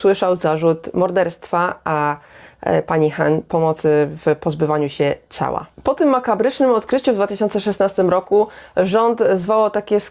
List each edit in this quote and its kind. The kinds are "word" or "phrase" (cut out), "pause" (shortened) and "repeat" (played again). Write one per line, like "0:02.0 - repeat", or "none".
none